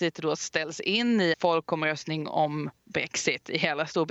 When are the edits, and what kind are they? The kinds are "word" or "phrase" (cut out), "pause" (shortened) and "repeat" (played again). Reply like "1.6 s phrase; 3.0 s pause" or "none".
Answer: 1.3 s word